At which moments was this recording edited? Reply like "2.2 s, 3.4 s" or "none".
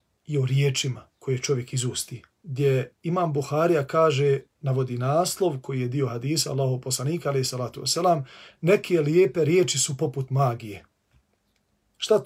1.1 s, 2.3 s, 4.5 s